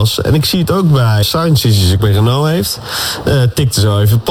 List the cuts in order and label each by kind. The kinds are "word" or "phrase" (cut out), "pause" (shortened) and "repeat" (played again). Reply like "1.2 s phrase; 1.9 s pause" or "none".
1.2 s word; 2.0 s word